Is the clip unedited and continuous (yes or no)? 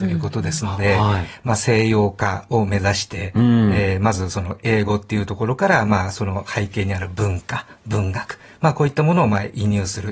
yes